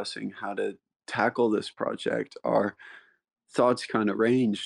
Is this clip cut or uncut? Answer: uncut